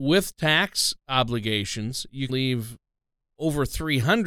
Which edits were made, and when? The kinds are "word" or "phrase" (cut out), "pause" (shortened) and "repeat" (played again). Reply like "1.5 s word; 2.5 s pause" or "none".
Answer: 2.3 s word